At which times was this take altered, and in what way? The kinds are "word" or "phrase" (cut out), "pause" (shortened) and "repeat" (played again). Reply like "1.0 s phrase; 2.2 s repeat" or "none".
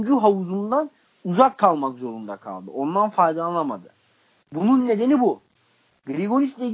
none